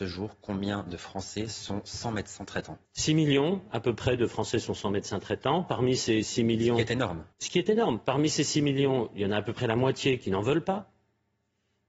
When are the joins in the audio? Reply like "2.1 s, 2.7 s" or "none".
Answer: 2.9 s, 7.3 s